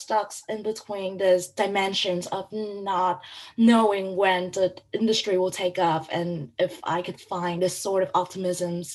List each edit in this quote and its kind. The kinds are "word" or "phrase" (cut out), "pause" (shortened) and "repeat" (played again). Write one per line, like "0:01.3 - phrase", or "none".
none